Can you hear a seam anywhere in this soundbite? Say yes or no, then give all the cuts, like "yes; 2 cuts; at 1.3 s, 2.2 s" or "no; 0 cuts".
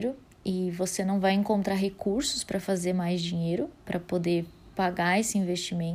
no; 0 cuts